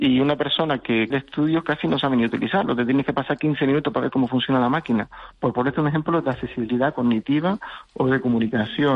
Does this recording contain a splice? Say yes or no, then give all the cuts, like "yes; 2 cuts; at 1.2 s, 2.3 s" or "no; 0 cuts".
yes; 1 cut; at 1.1 s